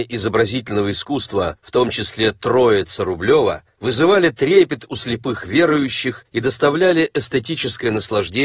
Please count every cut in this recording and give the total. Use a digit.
0